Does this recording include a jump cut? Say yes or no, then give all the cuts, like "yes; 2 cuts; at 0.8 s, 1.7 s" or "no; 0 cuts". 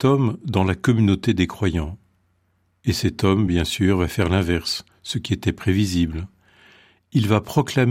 no; 0 cuts